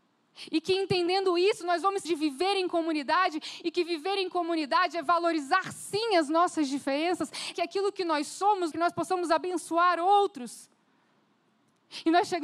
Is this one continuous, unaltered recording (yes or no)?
no